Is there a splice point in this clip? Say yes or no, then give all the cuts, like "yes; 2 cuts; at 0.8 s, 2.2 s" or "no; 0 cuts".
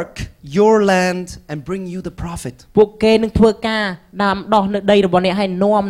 no; 0 cuts